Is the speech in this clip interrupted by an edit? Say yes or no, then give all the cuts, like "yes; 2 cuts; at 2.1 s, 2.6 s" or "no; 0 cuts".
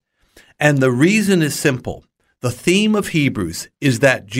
no; 0 cuts